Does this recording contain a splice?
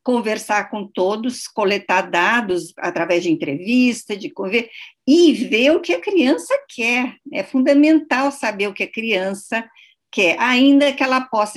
no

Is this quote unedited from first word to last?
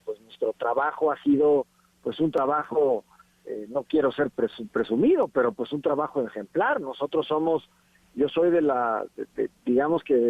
yes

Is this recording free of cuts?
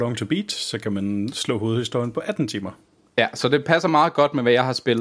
yes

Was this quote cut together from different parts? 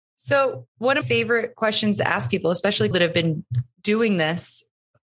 yes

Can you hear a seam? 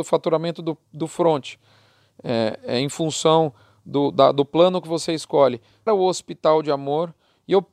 yes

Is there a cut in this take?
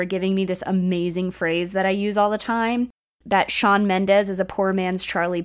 no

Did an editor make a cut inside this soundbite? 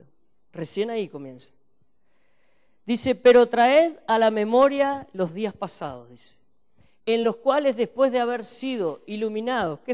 no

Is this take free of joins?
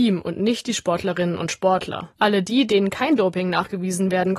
no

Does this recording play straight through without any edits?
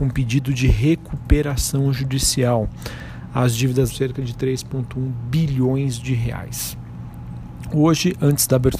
no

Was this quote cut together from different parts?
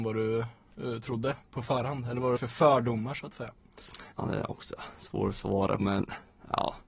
yes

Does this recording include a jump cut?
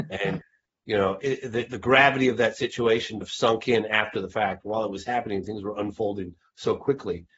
yes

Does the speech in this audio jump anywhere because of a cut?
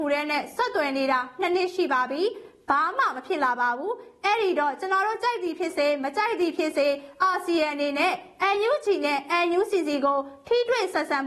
no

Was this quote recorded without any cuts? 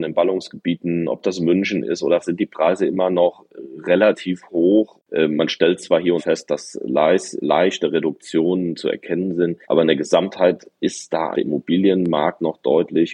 no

